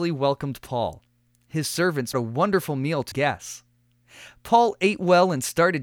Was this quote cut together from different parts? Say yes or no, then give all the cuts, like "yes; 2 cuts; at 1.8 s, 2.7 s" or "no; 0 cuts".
yes; 2 cuts; at 2.1 s, 3.1 s